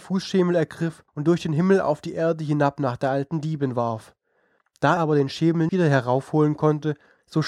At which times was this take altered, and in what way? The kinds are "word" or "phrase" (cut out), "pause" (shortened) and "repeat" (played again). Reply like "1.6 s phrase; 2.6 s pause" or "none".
1.1 s pause; 5.0 s word; 5.7 s word

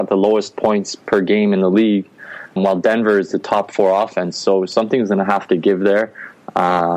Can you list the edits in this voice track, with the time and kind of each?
1.1 s word; 2.6 s word

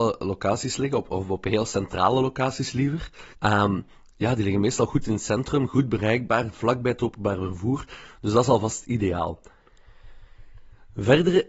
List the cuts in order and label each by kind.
3.3 s pause

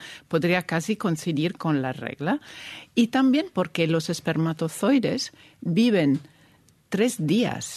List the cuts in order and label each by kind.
none

